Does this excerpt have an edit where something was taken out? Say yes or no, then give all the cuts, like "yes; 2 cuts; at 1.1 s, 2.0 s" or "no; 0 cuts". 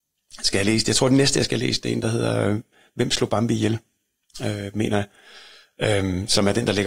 no; 0 cuts